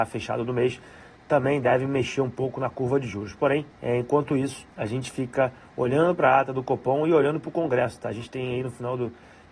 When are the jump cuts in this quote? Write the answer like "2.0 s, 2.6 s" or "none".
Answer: 3.7 s, 4.7 s

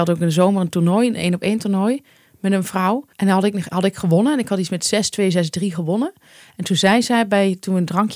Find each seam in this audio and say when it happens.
3.1 s

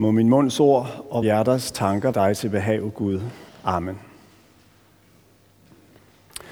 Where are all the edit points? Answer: 1.2 s, 2.1 s, 3.5 s

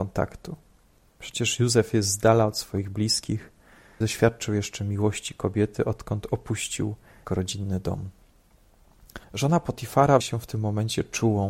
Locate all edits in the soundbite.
4.0 s, 7.3 s, 9.2 s, 10.2 s

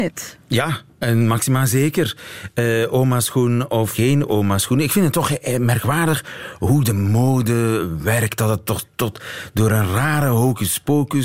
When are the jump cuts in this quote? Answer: 3.9 s

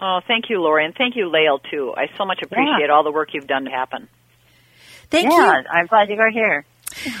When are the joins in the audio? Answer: 3.7 s, 5.9 s

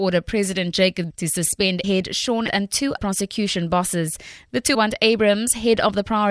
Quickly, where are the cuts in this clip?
1.1 s, 1.8 s, 2.5 s, 3.0 s, 4.7 s

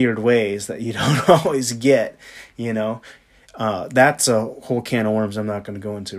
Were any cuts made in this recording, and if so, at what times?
none

